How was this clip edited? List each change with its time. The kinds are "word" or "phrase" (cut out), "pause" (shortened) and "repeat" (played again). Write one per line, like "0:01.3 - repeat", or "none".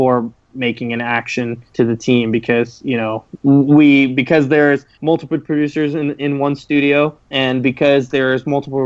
0:01.7 - pause
0:04.9 - pause
0:07.2 - pause

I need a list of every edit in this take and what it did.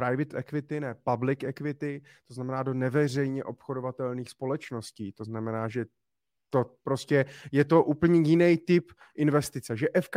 none

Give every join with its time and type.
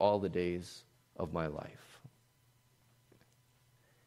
0:01.0 - pause

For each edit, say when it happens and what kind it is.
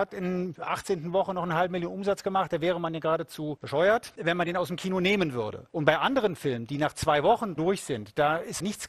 0:07.6 - word

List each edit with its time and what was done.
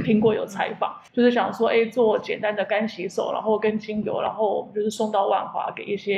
0:01.1 - pause

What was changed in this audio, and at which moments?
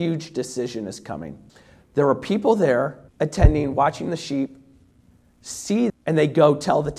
0:01.5 - pause
0:03.1 - pause
0:05.9 - word

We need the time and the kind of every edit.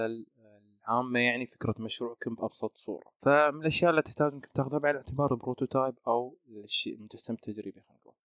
none

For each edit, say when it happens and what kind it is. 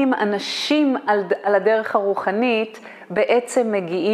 none

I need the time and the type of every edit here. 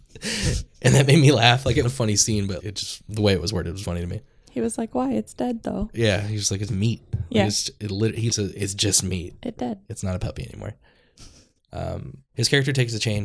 0:01.8 - word
0:02.6 - word
0:03.8 - word
0:06.7 - word
0:08.3 - word
0:12.3 - word

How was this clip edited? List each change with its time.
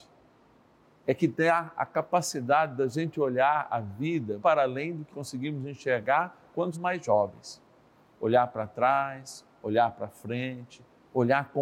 0:04.4 - word
0:05.1 - word
0:06.7 - word

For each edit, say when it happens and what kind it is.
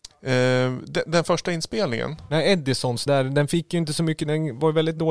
0:03.1 - word

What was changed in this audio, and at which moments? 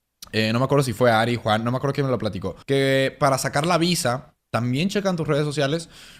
0:02.6 - pause

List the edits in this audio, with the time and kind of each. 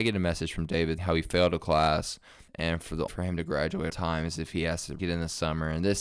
0:01.0 - word
0:02.5 - pause
0:03.1 - phrase
0:03.9 - word
0:05.0 - word

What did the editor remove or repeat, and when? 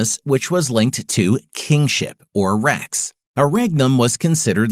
0:03.2 - pause

